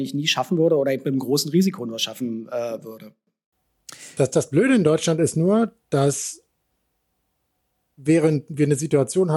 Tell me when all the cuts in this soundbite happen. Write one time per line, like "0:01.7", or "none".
none